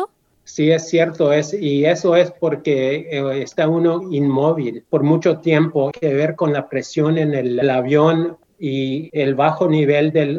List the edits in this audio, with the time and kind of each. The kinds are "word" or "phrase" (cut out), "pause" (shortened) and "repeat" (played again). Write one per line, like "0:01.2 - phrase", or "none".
0:04.9 - pause
0:05.9 - phrase
0:07.6 - phrase

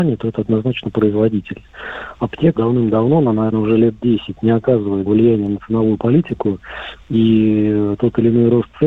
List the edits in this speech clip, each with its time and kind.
0:02.6 - word
0:03.5 - word
0:05.1 - word

